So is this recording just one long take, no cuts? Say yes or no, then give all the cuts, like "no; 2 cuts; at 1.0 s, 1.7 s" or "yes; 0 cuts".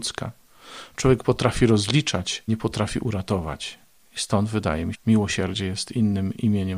no; 2 cuts; at 2.5 s, 4.9 s